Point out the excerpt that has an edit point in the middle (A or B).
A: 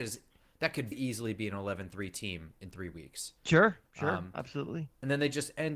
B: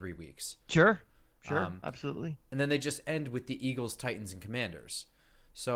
A